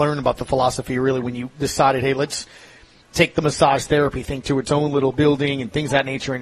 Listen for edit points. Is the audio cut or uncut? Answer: uncut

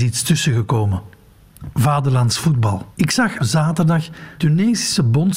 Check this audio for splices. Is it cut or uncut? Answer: cut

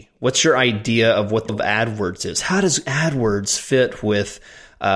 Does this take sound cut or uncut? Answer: cut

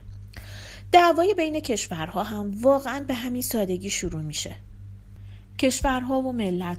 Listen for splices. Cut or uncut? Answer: uncut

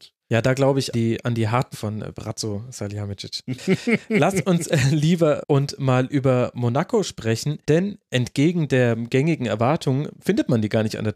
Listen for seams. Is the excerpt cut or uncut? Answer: cut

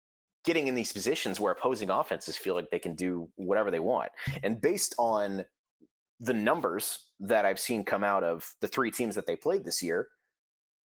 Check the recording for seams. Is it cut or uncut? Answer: uncut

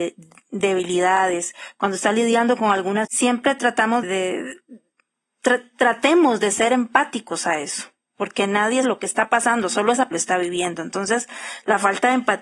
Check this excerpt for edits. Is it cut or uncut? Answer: cut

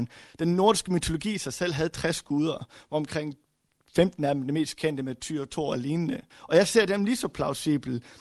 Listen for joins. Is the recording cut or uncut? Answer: cut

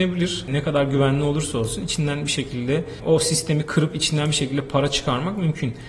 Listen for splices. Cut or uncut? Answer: uncut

